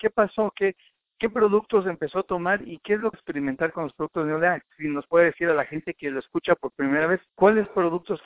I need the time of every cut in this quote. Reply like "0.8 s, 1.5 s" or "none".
3.1 s, 7.3 s